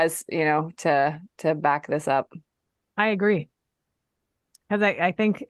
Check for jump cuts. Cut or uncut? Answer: uncut